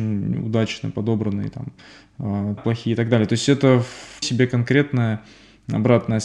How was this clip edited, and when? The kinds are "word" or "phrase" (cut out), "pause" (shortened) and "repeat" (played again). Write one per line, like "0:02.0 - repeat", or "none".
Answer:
0:02.6 - word
0:04.2 - word